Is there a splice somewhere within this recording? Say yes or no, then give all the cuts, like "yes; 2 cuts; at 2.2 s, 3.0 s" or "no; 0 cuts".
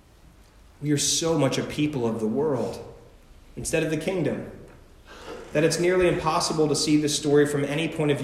no; 0 cuts